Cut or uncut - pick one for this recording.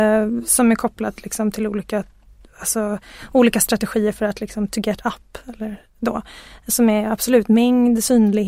uncut